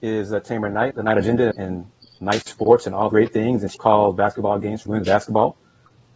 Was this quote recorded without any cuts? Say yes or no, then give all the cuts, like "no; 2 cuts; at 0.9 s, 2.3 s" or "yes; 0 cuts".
no; 5 cuts; at 0.9 s, 1.5 s, 3.1 s, 3.7 s, 4.9 s